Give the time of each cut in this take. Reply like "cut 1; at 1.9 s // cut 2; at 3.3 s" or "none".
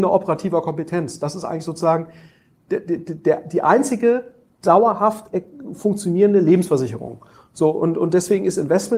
none

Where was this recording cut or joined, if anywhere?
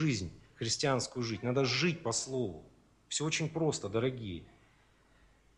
none

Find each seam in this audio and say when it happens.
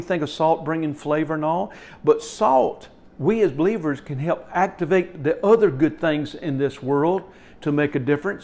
none

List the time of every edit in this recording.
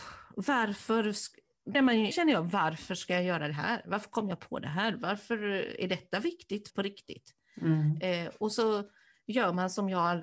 cut 1; at 1.7 s // cut 2; at 2.1 s // cut 3; at 6.7 s

